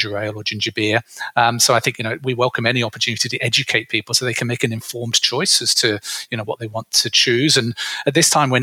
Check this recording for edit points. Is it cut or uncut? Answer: uncut